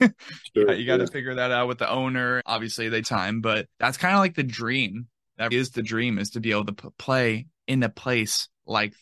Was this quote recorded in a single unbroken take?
no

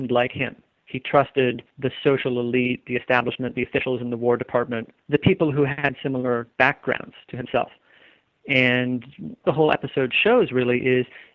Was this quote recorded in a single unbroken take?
no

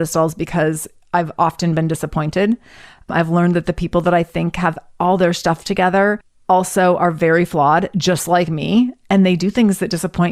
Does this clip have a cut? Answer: no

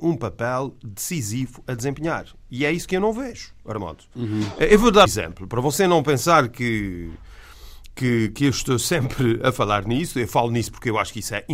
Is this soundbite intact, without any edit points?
no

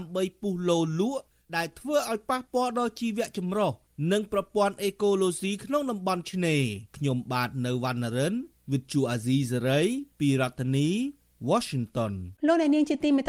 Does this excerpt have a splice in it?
yes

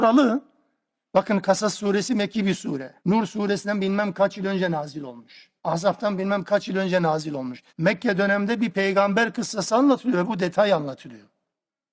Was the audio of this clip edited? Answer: yes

